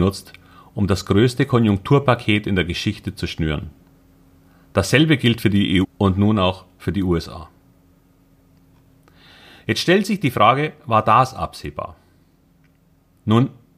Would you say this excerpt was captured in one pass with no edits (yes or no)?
no